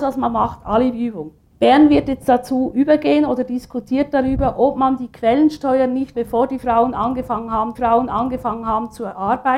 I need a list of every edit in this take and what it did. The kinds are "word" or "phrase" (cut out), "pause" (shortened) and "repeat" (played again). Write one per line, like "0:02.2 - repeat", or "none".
0:01.5 - pause
0:06.1 - word
0:07.7 - repeat